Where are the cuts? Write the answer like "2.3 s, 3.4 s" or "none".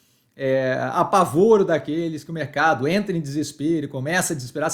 none